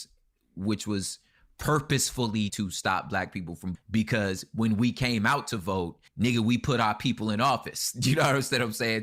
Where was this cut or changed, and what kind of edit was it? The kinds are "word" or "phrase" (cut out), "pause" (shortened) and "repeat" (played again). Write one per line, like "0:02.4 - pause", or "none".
0:02.5 - word
0:03.7 - word
0:06.1 - pause